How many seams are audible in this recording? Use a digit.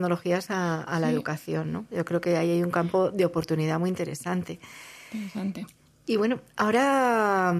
0